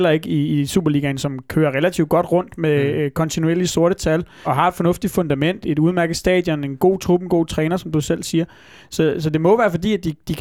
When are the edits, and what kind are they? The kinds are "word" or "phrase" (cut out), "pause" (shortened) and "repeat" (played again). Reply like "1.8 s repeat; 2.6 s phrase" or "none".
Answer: 4.4 s word; 5.6 s word